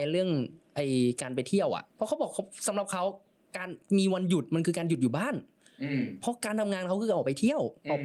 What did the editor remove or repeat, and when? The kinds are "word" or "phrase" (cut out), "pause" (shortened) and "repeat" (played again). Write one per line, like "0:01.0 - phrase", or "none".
0:01.9 - pause